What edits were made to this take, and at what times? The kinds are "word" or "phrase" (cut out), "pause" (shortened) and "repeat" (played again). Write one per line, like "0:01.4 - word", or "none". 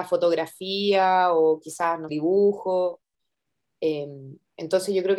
0:02.1 - phrase

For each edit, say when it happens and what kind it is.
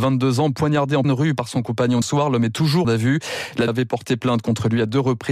0:01.0 - word
0:02.0 - word
0:02.8 - phrase
0:03.7 - word

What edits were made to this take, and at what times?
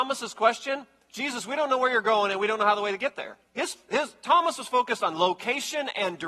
0:03.5 - pause

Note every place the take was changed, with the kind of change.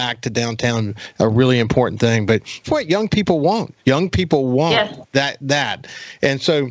0:02.6 - word
0:03.8 - pause

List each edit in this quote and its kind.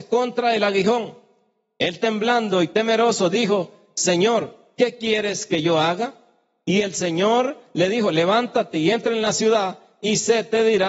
none

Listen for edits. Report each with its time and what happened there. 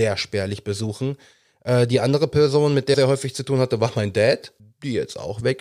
0:02.9 - word
0:04.6 - pause

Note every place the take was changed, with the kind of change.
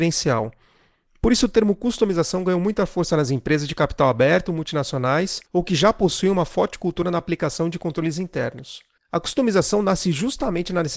none

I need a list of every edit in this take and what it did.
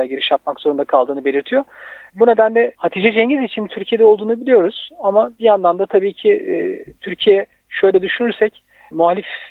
0:06.9 - pause

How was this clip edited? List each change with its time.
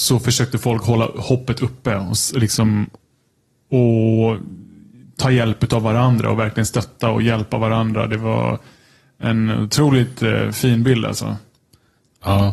none

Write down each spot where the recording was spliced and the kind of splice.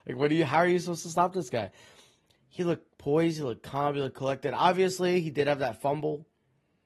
none

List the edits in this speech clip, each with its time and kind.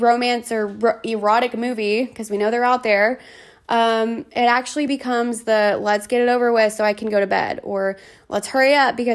none

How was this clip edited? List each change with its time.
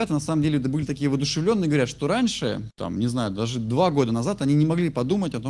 none

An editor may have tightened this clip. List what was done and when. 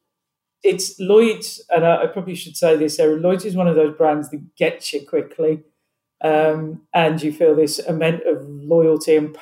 none

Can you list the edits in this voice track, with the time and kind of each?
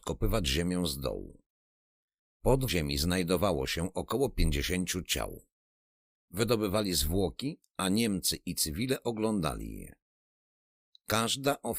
0:02.7 - word

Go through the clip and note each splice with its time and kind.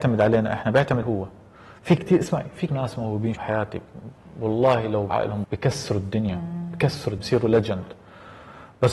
0:01.0 - word
0:02.0 - word
0:02.7 - word
0:03.4 - word
0:05.1 - word
0:05.4 - word
0:07.2 - word

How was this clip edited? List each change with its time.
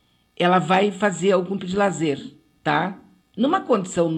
0:01.6 - word
0:03.2 - pause

